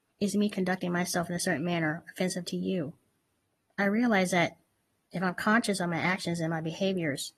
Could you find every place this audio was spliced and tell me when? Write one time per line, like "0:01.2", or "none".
none